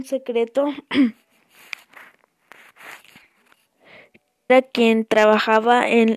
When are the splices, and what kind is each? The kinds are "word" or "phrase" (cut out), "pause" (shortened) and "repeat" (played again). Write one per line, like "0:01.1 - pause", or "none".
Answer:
0:04.5 - word